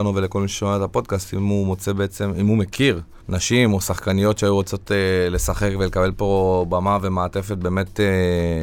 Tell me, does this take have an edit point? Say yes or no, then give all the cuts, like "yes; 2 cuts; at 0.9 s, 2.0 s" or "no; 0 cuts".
yes; 1 cut; at 3.2 s